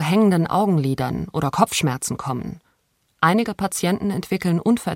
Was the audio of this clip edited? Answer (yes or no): no